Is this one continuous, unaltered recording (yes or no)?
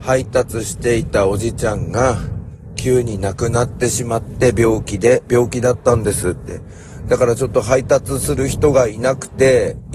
yes